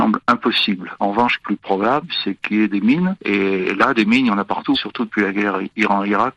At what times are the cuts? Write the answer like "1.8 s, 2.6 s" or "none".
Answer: 1.4 s